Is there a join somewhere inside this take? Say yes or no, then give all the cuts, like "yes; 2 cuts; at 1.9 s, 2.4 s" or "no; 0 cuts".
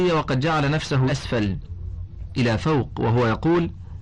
yes; 2 cuts; at 1.1 s, 2.4 s